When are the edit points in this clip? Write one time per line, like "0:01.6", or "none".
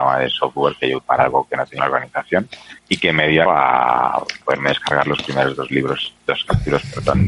0:01.0
0:01.8
0:02.8
0:03.5
0:04.4
0:06.2